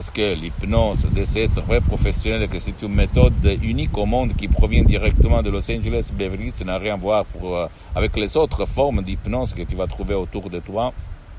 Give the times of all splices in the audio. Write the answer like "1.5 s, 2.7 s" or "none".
none

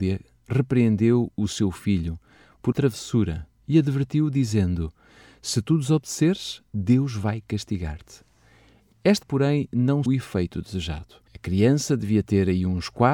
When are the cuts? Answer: 2.7 s, 9.2 s, 10.1 s, 11.3 s

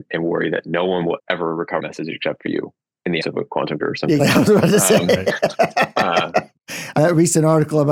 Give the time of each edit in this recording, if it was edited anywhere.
1.2 s, 1.8 s, 3.2 s, 3.8 s, 4.2 s, 7.0 s

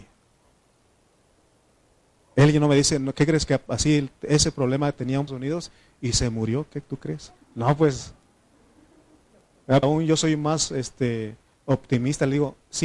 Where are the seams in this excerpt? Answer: 5.3 s, 7.4 s, 9.8 s

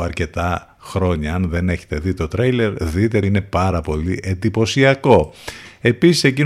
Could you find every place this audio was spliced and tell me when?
3.2 s

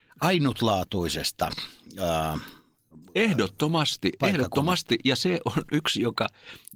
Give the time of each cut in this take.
3.0 s

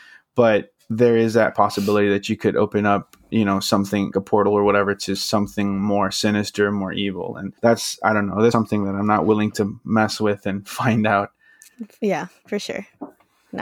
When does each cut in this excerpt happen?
4.1 s, 7.6 s, 8.5 s

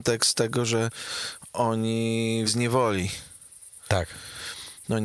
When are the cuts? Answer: 2.5 s

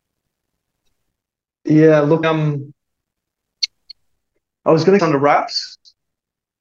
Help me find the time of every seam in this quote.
2.2 s, 5.0 s

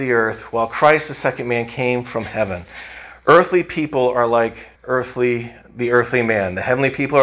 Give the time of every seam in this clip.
4.8 s

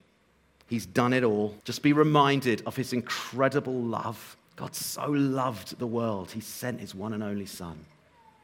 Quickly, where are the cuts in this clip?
1.6 s, 4.5 s

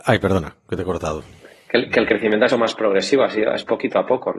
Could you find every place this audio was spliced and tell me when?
2.5 s

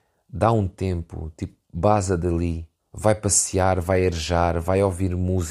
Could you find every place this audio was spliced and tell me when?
2.8 s

